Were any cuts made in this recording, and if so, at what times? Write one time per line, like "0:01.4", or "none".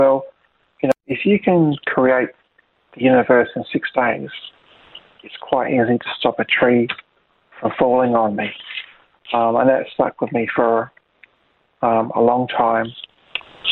none